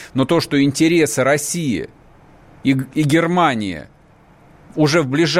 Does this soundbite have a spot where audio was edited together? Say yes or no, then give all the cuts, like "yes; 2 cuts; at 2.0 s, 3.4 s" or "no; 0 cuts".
no; 0 cuts